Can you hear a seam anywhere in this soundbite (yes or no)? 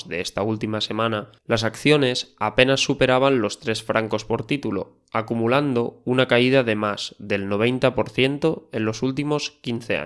yes